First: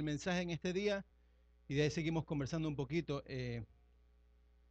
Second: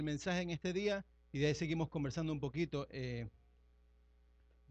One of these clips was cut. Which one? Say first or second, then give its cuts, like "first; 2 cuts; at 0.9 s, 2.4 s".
second; 1 cut; at 1.1 s